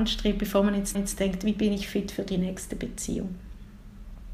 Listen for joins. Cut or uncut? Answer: cut